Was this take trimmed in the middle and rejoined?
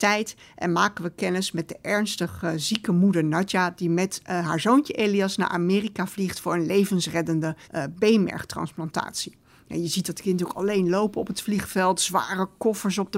yes; 1 cut; at 7.6 s

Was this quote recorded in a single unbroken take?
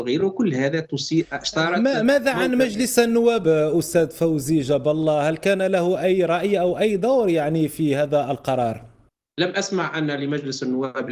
no; 1 cut; at 3.4 s

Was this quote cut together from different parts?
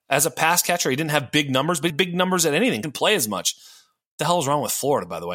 yes; 2 cuts; at 1.9 s, 2.8 s

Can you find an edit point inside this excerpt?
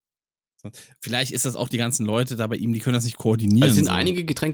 no; 0 cuts

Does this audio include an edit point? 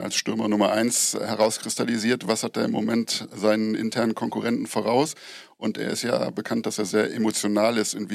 no; 0 cuts

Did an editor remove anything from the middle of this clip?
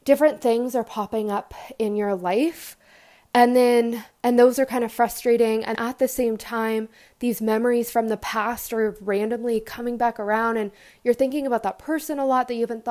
yes; 1 cut; at 5.7 s

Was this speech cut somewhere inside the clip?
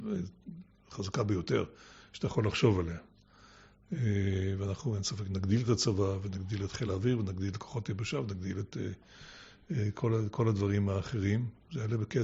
no; 0 cuts

